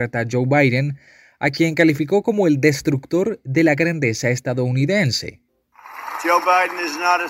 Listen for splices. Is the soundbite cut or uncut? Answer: uncut